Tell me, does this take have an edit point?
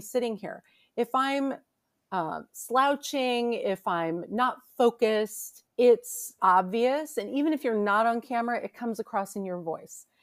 yes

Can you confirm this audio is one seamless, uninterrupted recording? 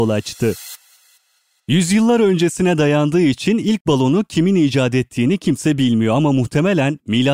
yes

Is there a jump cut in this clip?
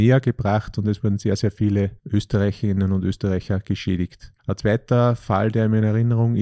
yes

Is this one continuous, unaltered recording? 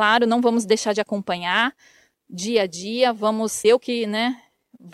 no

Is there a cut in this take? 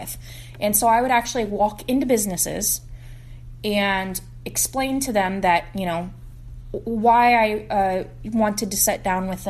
no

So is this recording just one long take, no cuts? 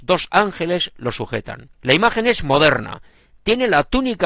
no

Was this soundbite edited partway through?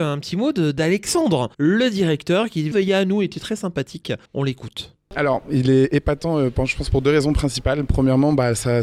yes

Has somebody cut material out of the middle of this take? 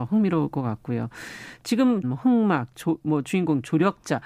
yes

